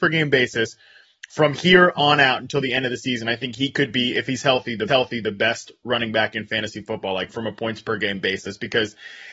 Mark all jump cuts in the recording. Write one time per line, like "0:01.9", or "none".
0:04.9
0:07.3